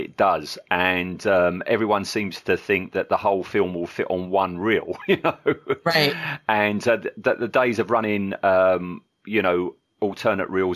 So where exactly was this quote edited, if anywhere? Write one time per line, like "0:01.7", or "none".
none